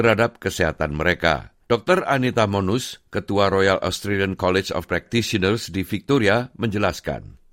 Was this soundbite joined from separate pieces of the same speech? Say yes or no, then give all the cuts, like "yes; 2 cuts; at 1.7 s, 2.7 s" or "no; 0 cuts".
yes; 2 cuts; at 1.6 s, 4.9 s